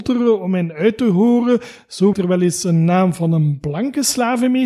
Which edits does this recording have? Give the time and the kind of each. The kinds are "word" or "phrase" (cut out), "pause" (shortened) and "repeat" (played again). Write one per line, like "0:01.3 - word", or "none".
0:02.1 - word